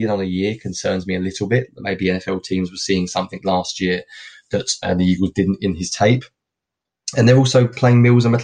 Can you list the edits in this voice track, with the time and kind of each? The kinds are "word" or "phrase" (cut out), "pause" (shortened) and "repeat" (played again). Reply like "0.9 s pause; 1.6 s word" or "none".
none

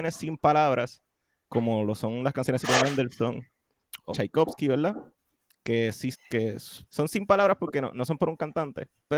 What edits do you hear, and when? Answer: 2.6 s word; 4.1 s word; 6.1 s word; 6.8 s word

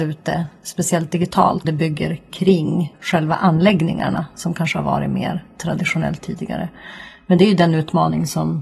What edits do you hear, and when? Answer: 1.6 s word; 2.9 s phrase

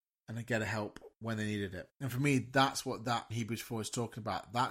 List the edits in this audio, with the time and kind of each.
1.9 s pause; 3.3 s phrase

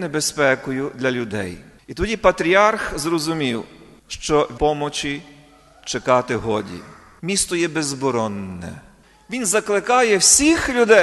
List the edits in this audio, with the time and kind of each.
4.6 s phrase

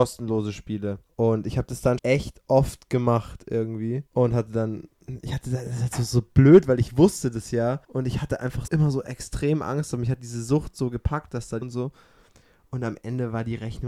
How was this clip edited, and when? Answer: 1.1 s pause; 2.0 s word; 4.1 s pause; 7.8 s pause; 8.7 s word; 11.6 s phrase

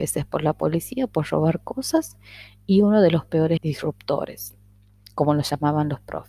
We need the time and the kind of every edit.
3.6 s word

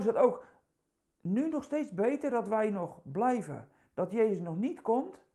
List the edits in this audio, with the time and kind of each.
none

